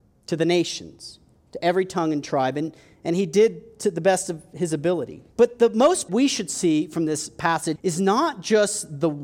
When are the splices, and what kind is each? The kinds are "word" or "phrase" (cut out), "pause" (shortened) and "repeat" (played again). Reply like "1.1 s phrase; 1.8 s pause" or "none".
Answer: 5.3 s pause; 6.1 s phrase; 7.8 s word